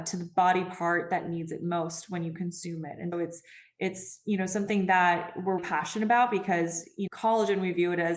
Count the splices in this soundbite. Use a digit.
3